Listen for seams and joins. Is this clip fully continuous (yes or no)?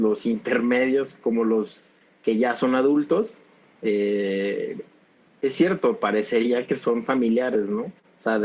yes